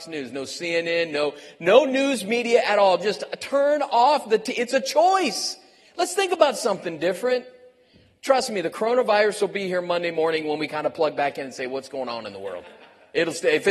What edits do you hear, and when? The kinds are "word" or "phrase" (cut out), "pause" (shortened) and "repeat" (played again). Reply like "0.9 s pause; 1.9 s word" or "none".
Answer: none